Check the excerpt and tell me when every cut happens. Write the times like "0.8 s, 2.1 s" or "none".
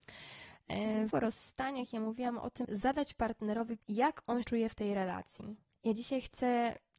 1.1 s, 2.6 s, 3.8 s, 4.4 s